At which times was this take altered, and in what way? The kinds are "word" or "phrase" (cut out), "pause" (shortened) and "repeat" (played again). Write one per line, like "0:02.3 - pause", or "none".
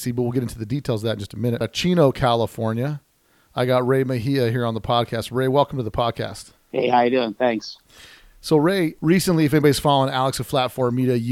none